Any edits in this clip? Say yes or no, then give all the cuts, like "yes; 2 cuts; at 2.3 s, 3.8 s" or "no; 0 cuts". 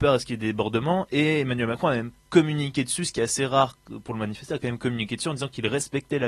no; 0 cuts